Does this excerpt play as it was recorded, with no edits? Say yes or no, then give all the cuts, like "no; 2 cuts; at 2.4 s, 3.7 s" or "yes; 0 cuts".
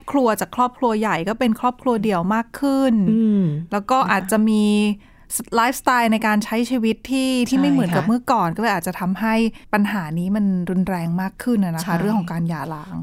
no; 1 cut; at 9.6 s